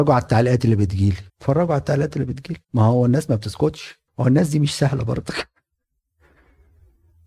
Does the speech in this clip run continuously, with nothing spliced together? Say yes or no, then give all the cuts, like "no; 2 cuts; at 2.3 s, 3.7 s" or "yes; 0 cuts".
no; 3 cuts; at 1.3 s, 2.6 s, 4.1 s